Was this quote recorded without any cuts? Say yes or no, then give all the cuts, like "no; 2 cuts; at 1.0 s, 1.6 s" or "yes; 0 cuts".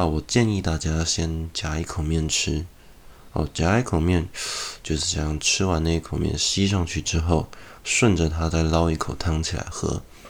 no; 1 cut; at 7.8 s